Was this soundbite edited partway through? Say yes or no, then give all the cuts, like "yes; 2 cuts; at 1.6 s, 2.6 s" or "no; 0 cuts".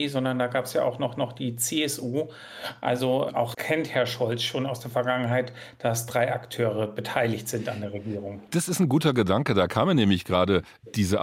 yes; 2 cuts; at 1.2 s, 3.5 s